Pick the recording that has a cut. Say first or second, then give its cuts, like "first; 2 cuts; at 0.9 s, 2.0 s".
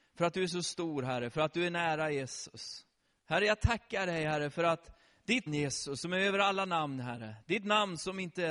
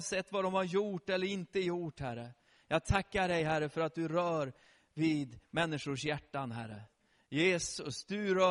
first; 2 cuts; at 3.1 s, 5.5 s